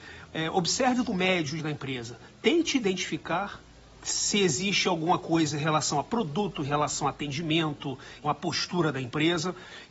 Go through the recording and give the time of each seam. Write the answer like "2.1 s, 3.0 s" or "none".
1.1 s, 1.6 s, 8.2 s